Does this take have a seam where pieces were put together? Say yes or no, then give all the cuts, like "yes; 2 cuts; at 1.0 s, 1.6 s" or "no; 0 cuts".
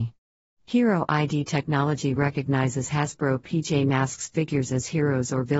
no; 0 cuts